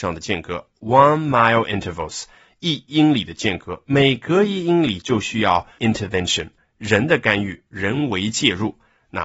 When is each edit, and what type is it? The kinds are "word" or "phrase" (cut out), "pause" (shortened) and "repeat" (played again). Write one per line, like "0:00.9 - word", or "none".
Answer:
0:05.8 - word